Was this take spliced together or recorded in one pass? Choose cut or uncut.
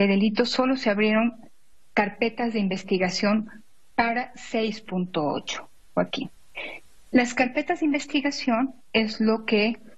uncut